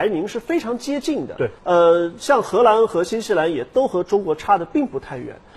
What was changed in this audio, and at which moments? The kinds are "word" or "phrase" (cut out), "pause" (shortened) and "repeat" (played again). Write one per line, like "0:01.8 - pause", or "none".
0:01.6 - pause